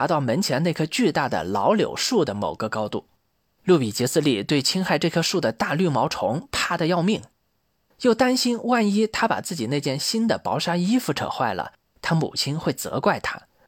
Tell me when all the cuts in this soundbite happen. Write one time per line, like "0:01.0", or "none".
none